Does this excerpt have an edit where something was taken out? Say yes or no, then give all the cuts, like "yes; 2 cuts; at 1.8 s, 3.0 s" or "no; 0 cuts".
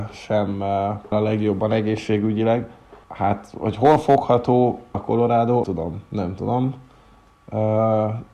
yes; 4 cuts; at 1.1 s, 3.0 s, 4.9 s, 5.6 s